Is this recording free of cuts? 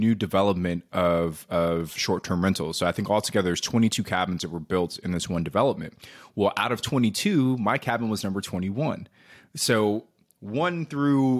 yes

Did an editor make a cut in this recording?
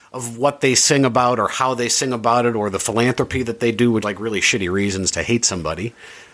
yes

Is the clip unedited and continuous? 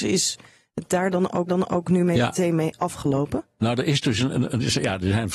no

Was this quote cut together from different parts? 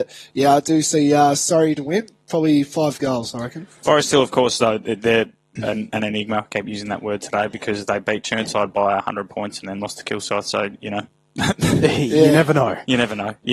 no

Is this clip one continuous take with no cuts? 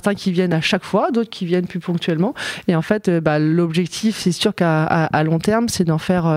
yes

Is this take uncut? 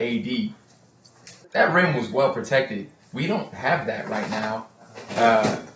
no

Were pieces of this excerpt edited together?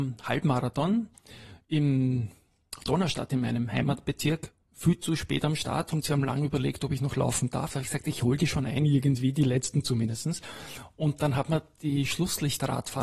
no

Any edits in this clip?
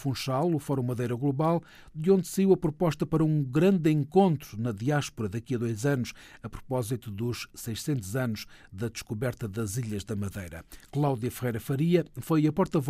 no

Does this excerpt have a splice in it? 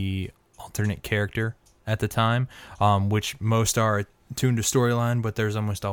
no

